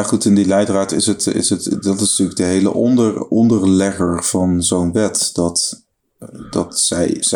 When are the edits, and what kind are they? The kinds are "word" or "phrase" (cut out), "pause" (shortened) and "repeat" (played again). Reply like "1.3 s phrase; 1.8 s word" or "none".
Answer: none

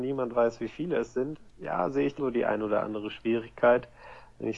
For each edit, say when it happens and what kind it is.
1.5 s pause; 2.2 s word

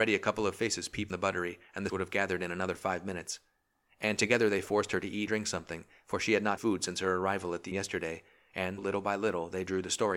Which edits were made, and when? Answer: 1.1 s word; 1.9 s word; 5.3 s word; 6.6 s word; 7.7 s word; 8.8 s word

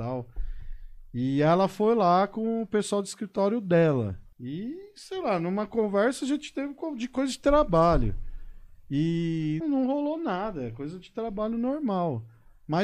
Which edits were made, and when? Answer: 4.3 s pause; 9.6 s word

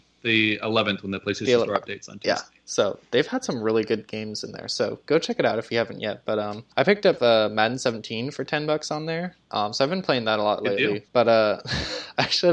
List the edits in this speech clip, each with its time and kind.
6.7 s pause; 9.4 s pause; 11.1 s pause

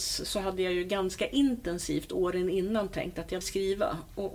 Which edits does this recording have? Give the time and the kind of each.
3.4 s word

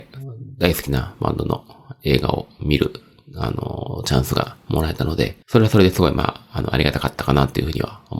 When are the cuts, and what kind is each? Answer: 5.4 s pause

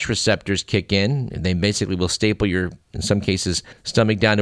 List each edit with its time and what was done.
2.8 s pause

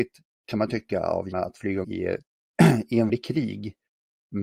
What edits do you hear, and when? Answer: 1.3 s word; 1.8 s word; 2.2 s pause; 3.1 s word

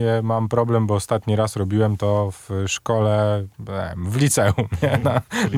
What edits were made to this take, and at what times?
none

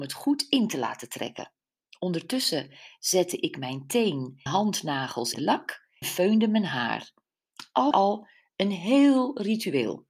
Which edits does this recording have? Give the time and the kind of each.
4.5 s word; 5.3 s word; 6.0 s word; 7.9 s word

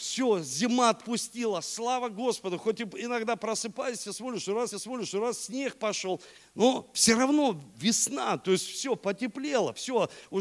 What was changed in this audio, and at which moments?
4.7 s repeat

